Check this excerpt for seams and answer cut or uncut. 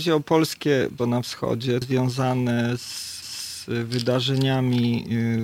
cut